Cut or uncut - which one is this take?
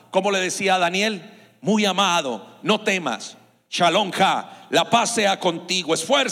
uncut